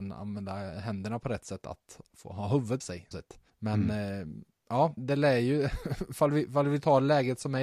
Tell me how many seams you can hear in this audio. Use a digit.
4